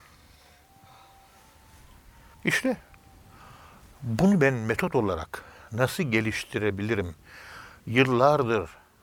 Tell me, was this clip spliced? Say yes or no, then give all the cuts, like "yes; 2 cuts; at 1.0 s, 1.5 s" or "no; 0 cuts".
no; 0 cuts